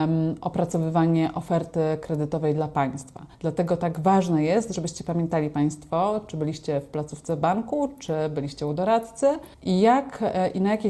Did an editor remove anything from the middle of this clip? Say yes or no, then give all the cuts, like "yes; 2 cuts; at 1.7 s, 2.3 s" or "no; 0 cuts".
yes; 2 cuts; at 3.3 s, 9.5 s